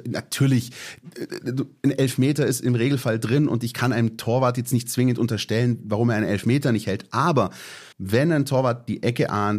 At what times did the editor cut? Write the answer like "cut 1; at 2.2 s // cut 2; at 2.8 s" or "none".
cut 1; at 7.9 s